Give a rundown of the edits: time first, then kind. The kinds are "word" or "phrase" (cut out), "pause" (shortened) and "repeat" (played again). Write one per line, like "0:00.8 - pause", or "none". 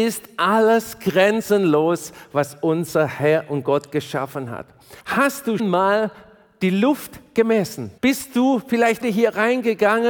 0:05.0 - pause
0:05.6 - word
0:08.0 - pause
0:09.0 - word